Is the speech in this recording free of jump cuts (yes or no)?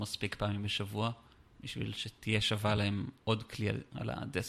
yes